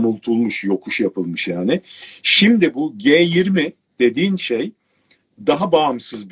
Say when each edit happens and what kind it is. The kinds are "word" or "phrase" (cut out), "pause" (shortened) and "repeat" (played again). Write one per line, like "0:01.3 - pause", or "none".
none